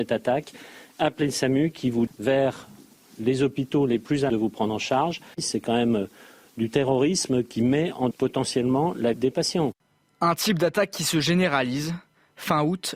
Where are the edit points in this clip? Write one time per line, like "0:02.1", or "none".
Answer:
0:02.1
0:04.3
0:08.1
0:09.1

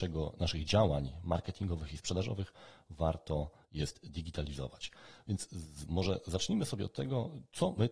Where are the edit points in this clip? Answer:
none

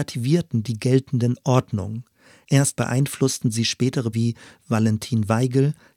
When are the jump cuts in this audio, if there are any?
0:02.8
0:04.1

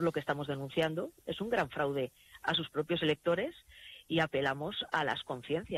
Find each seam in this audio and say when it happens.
none

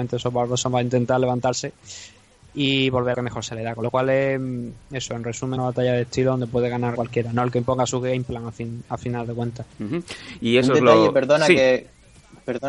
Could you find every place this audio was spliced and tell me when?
0:03.1
0:05.6
0:06.9

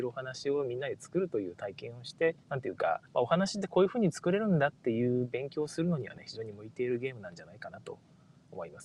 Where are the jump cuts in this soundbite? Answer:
0:02.4
0:03.0

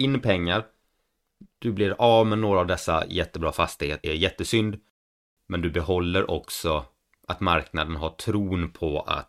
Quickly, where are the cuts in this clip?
0:04.0

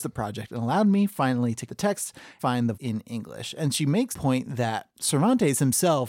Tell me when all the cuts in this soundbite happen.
0:01.7
0:02.4
0:02.7
0:04.1

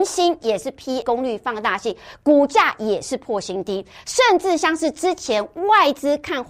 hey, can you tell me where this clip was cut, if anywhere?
0:01.0

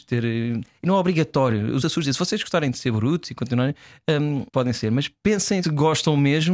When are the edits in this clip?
0:01.8
0:04.5
0:05.6

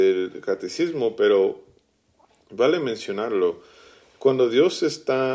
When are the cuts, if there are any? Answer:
none

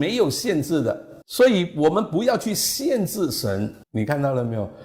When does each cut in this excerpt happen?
0:01.2
0:03.8

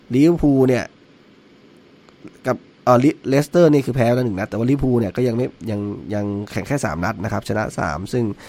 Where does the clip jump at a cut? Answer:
0:02.6

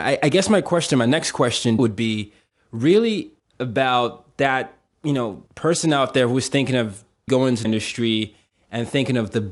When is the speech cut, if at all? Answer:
0:01.8
0:03.4
0:04.9
0:05.5
0:07.3
0:07.6

